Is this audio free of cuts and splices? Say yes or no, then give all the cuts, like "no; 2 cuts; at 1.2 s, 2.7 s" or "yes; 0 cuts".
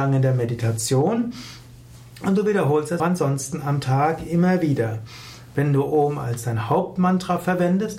no; 1 cut; at 3.0 s